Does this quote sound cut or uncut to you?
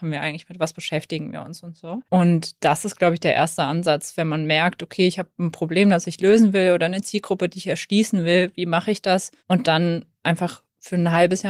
cut